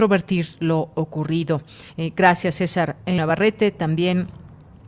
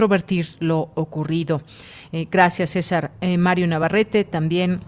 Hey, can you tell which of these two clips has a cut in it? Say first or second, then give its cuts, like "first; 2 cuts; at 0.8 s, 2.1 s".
first; 2 cuts; at 1.9 s, 3.2 s